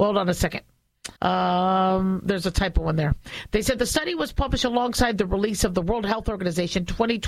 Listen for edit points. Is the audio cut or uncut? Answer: cut